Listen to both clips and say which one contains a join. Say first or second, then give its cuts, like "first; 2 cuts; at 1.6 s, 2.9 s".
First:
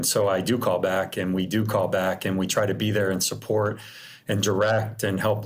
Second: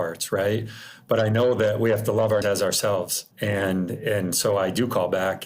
second; 2 cuts; at 2.4 s, 3.3 s